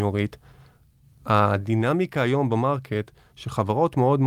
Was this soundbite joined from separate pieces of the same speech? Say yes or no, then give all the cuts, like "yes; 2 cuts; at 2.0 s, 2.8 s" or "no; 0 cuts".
no; 0 cuts